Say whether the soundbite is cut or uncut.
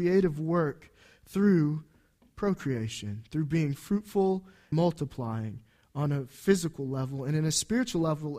cut